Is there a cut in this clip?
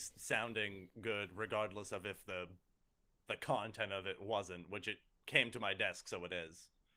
no; 0 cuts

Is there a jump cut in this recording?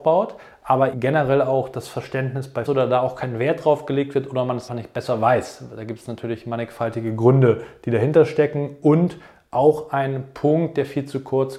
yes; 3 cuts; at 0.9 s, 2.7 s, 4.7 s

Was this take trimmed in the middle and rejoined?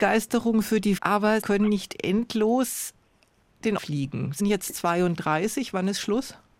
yes; 4 cuts; at 1.0 s, 1.4 s, 3.8 s, 4.4 s

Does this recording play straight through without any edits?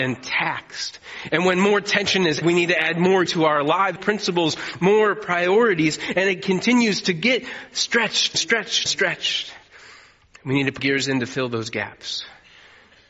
no; 6 cuts; at 2.4 s, 3.3 s, 4.0 s, 8.3 s, 8.9 s, 10.8 s

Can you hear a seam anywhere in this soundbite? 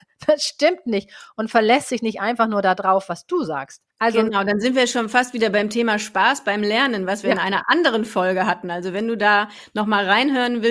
yes; 1 cut; at 3.9 s

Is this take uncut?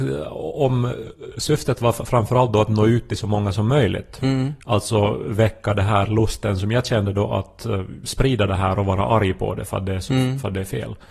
yes; 0 cuts

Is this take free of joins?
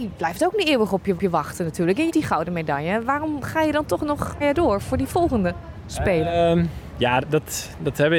no; 4 cuts; at 1.2 s, 2.1 s, 4.4 s, 7.2 s

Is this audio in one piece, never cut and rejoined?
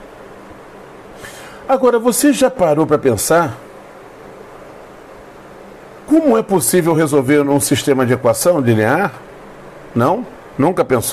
yes; 0 cuts

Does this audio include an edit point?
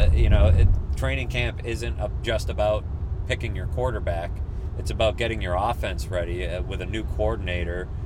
no; 0 cuts

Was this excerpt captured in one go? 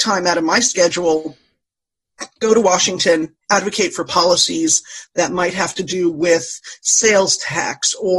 no; 1 cut; at 3.4 s

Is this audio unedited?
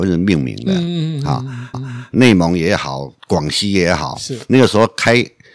no; 1 cut; at 1.7 s

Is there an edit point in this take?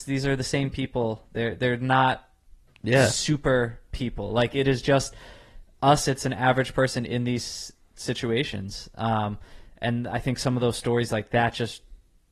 no; 0 cuts

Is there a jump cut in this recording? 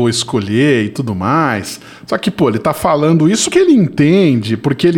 yes; 1 cut; at 3.5 s

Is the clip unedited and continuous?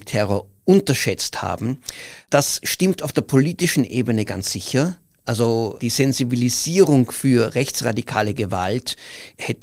yes; 0 cuts

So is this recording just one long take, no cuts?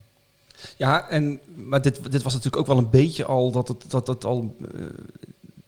yes; 0 cuts

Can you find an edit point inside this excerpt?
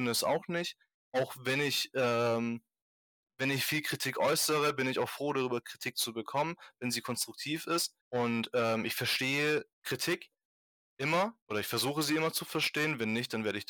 yes; 3 cuts; at 8.0 s, 9.7 s, 11.4 s

